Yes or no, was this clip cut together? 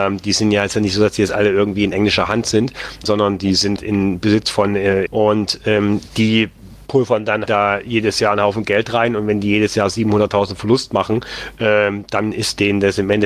yes